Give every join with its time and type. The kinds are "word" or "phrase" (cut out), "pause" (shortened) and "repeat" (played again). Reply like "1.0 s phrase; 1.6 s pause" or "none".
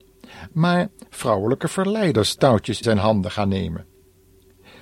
2.4 s word; 2.8 s word